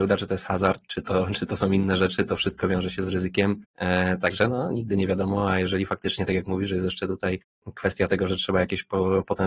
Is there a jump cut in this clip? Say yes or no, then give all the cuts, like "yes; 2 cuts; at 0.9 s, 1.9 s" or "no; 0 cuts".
yes; 1 cut; at 3.7 s